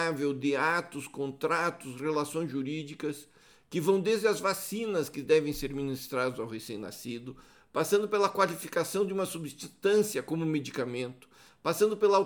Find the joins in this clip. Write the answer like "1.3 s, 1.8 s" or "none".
none